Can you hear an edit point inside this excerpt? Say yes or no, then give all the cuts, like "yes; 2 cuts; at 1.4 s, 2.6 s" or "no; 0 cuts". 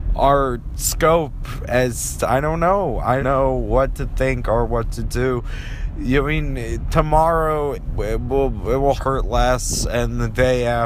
yes; 4 cuts; at 2.2 s, 3.2 s, 7.7 s, 9.0 s